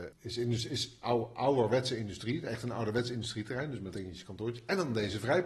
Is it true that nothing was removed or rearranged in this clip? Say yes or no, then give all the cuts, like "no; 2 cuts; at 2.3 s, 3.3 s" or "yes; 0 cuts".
no; 1 cut; at 3.9 s